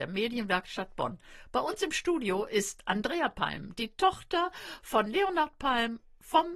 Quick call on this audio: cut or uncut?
uncut